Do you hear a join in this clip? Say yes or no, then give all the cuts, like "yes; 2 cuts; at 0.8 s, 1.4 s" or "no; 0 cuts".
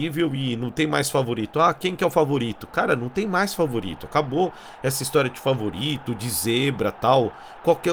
no; 0 cuts